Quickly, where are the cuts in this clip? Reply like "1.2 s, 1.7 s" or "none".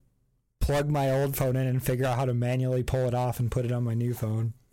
none